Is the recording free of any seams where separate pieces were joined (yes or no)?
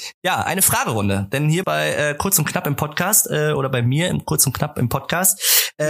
no